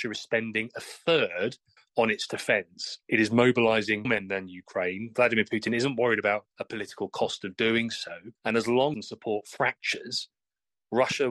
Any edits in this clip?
yes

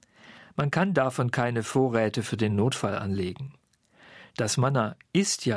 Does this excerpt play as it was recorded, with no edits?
yes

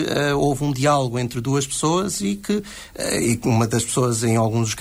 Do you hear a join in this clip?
no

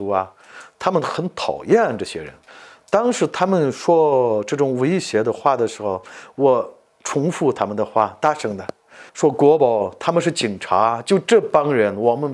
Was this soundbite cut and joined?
yes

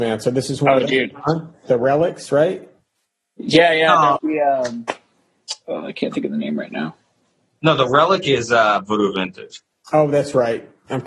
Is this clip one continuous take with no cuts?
no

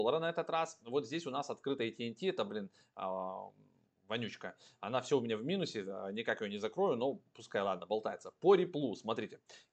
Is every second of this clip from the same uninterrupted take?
yes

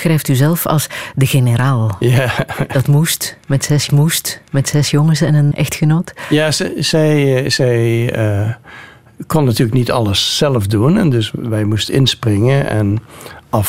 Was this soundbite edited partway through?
yes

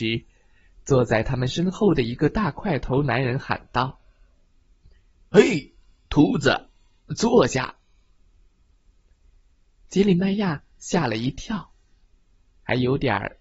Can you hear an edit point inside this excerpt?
no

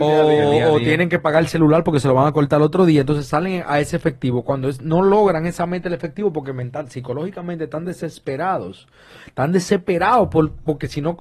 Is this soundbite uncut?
yes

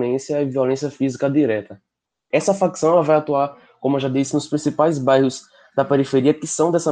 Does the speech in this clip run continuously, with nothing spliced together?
yes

